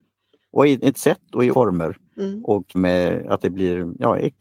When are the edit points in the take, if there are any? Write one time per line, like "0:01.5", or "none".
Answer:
0:00.9
0:01.5
0:02.1
0:02.7